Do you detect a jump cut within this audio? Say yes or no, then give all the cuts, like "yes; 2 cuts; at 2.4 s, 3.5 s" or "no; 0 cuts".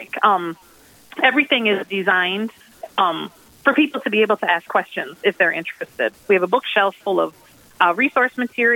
no; 0 cuts